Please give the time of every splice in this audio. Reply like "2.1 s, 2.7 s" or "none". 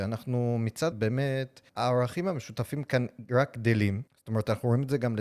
0.9 s, 1.7 s, 4.1 s

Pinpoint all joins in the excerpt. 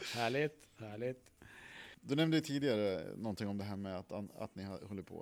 2.0 s

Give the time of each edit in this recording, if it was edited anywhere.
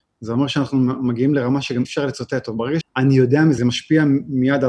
1.8 s, 2.8 s, 3.6 s

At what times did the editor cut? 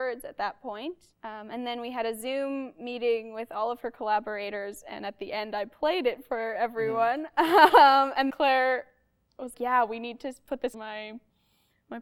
1.1 s, 8.3 s, 9.5 s, 10.7 s

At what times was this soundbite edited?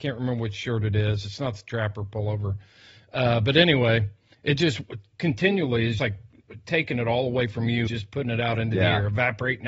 6.0 s, 7.9 s

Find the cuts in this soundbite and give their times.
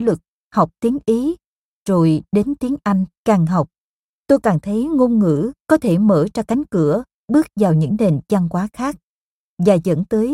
3.2 s, 5.6 s

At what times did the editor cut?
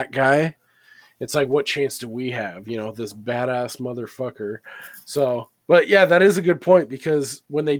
5.6 s

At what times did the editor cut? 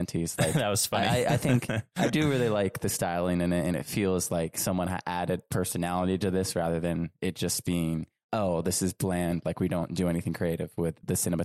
none

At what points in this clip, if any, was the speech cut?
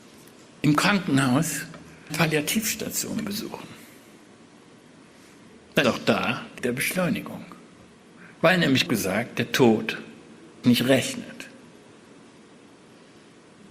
2.1 s, 5.8 s, 6.6 s, 8.9 s, 10.6 s

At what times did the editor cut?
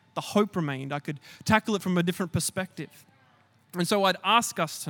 none

